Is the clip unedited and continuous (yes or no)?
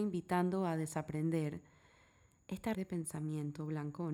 no